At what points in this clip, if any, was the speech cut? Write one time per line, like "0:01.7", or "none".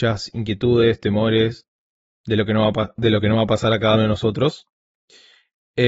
0:03.9